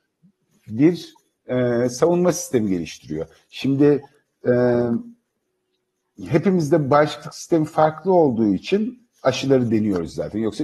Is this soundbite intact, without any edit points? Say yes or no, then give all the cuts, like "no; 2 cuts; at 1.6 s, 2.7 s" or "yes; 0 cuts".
yes; 0 cuts